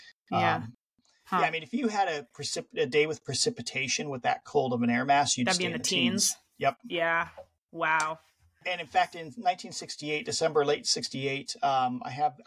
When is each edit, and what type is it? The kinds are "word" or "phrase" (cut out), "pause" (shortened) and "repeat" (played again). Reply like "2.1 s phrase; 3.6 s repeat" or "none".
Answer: none